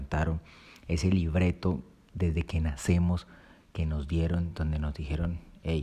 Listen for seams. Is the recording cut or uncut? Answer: uncut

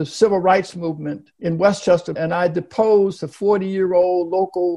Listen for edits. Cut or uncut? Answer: cut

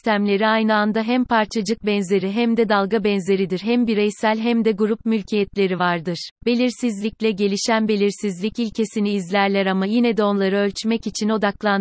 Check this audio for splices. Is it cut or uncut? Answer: cut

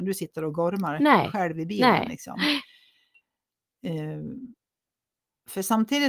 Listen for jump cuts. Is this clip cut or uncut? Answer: uncut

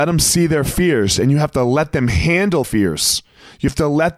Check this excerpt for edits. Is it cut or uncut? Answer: cut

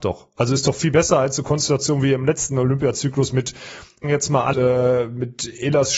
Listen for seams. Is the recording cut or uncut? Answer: cut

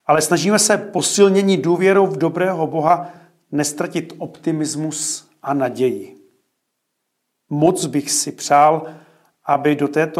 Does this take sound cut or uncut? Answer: uncut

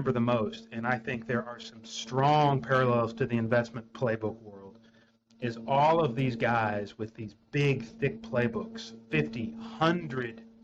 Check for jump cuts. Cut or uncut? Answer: uncut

